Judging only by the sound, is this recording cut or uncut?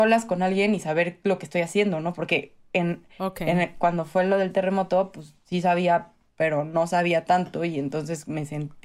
uncut